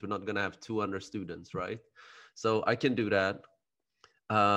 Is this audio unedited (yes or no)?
yes